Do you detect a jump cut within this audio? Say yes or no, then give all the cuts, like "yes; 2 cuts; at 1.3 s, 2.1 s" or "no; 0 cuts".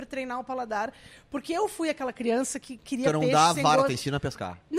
no; 0 cuts